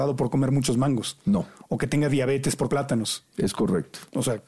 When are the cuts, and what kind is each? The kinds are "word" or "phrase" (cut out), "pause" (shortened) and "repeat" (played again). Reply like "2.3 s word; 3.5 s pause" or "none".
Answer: 2.7 s word